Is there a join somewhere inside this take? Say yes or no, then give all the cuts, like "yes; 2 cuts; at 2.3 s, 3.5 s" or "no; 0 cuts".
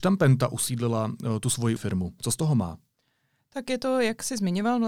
yes; 1 cut; at 1.8 s